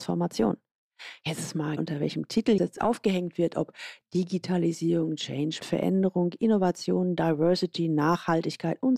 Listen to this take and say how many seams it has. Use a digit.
3